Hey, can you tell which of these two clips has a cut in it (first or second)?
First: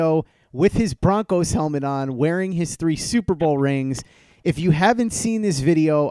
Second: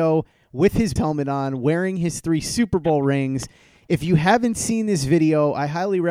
second